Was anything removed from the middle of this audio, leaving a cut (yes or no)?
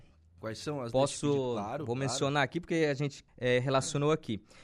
yes